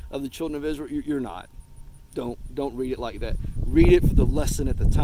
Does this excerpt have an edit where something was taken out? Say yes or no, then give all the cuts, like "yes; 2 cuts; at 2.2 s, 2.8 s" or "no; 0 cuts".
no; 0 cuts